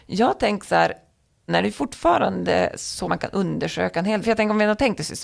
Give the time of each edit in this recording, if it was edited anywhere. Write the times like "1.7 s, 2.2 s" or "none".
1.5 s, 3.0 s, 4.2 s